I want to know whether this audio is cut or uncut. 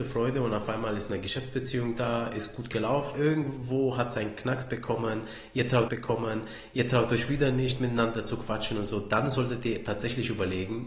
cut